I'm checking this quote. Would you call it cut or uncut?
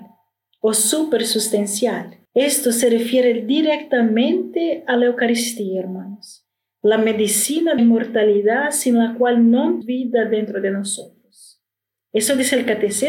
cut